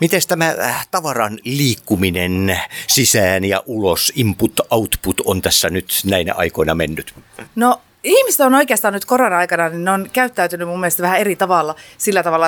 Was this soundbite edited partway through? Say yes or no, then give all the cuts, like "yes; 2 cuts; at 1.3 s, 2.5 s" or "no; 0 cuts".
yes; 1 cut; at 7.5 s